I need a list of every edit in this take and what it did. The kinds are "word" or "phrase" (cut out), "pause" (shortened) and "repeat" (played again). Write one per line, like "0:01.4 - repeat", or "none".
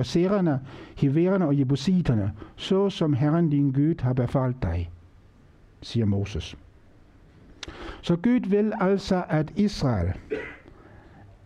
none